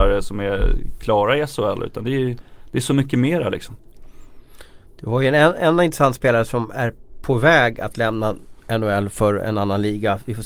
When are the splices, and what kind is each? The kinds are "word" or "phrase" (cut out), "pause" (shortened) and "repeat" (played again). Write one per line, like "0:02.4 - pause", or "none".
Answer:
none

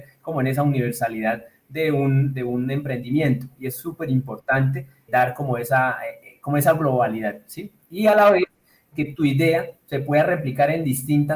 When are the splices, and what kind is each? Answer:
0:05.1 - word
0:08.9 - word

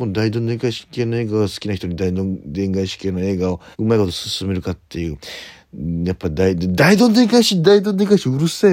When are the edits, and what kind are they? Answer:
0:03.7 - pause

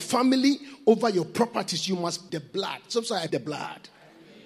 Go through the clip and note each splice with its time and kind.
0:02.3 - word
0:03.3 - word

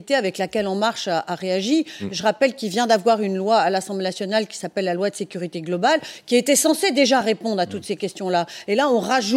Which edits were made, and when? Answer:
none

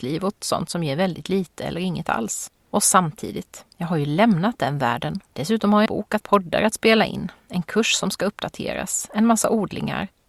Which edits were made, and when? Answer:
0:02.6 - pause
0:05.3 - pause
0:05.9 - word
0:06.2 - phrase

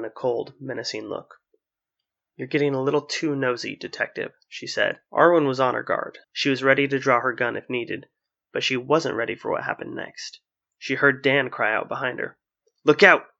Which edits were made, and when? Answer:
0:05.1 - pause
0:06.2 - pause

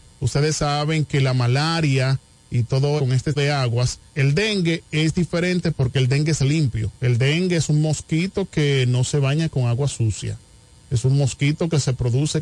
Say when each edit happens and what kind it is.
0:03.0 - phrase
0:03.4 - word
0:04.1 - pause
0:07.0 - pause

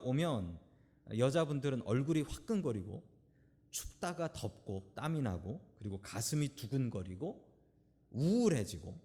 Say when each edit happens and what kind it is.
none

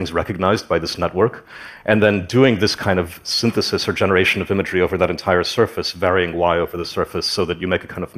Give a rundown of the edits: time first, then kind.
none

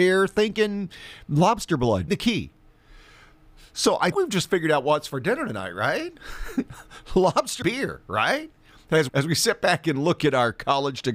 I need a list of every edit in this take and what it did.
0:02.1 - word
0:04.1 - word
0:07.6 - word
0:09.1 - word

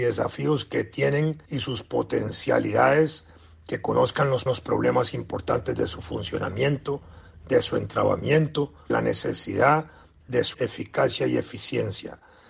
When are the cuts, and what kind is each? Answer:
0:01.5 - pause
0:04.5 - repeat
0:08.9 - word
0:10.5 - word

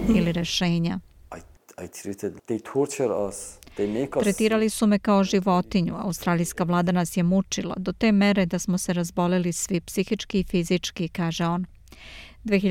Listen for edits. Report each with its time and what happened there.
0:02.4 - word

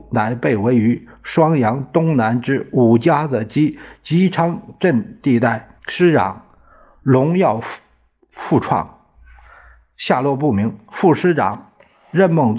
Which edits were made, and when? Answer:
0:05.8 - pause

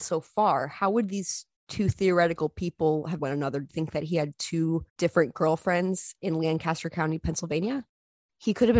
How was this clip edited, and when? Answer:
0:01.5 - pause
0:03.2 - word
0:03.7 - word
0:04.9 - pause

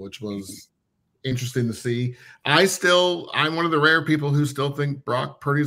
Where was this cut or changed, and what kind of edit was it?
none

